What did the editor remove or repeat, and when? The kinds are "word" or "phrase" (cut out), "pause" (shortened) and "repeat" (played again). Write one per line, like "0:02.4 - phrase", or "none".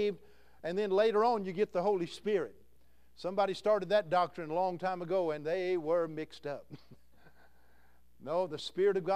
none